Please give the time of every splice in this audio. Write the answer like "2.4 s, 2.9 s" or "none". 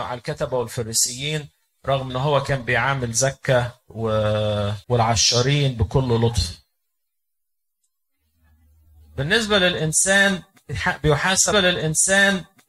2.1 s, 4.8 s, 11.5 s